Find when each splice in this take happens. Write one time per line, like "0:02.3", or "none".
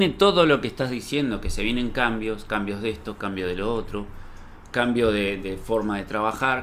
none